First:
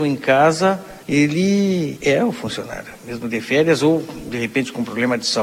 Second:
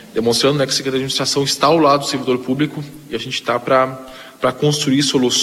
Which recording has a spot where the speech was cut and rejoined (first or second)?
first